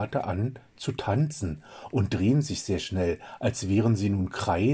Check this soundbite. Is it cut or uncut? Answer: uncut